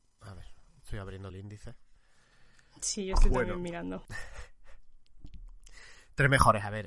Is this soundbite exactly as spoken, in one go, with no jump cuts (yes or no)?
no